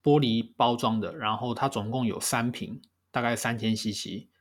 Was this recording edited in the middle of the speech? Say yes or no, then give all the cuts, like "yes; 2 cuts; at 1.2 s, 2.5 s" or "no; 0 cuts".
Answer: no; 0 cuts